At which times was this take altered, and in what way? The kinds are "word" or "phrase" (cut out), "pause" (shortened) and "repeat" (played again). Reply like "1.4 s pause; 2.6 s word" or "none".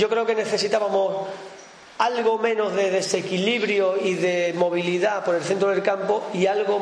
none